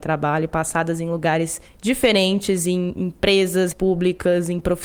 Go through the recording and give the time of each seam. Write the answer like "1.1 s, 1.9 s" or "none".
1.7 s, 3.7 s